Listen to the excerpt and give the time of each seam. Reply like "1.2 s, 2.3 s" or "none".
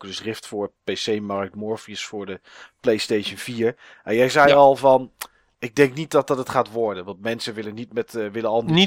none